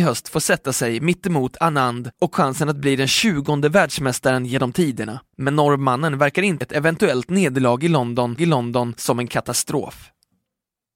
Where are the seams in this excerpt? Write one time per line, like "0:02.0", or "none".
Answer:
0:02.3
0:05.3
0:06.6
0:08.4